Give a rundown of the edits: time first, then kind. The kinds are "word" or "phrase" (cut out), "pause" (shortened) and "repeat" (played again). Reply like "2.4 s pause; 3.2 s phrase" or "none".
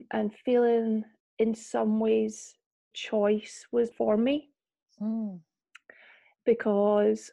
1.2 s word; 2.9 s word; 3.9 s word